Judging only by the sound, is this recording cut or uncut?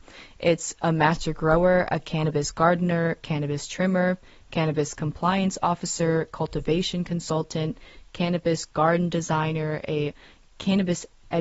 uncut